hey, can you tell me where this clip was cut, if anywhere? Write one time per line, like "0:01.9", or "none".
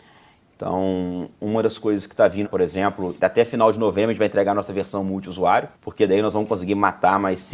0:02.4
0:03.2
0:05.7